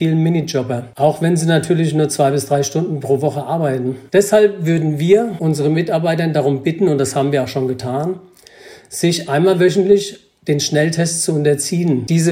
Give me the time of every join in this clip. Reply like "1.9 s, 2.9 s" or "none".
4.1 s